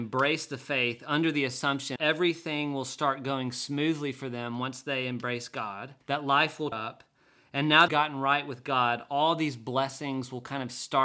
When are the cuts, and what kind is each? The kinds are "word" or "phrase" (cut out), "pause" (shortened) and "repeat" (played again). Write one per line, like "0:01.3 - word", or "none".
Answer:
0:02.0 - word
0:06.0 - pause
0:06.7 - word
0:07.9 - phrase

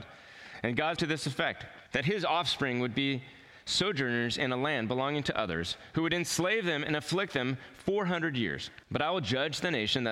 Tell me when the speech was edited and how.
0:01.0 - word
0:01.9 - pause
0:08.8 - pause

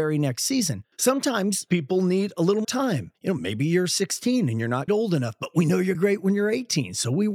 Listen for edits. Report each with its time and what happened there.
0:00.9 - pause
0:02.6 - word
0:03.1 - pause
0:04.9 - word
0:05.9 - phrase

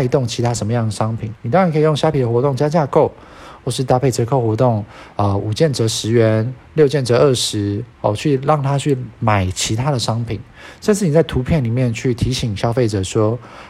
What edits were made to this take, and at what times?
0:01.4 - pause
0:07.9 - pause

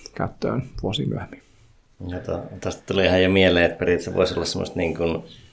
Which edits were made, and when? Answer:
none

